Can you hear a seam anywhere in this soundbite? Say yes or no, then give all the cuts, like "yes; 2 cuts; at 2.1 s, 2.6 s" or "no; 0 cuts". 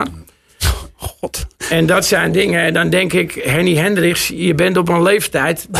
no; 0 cuts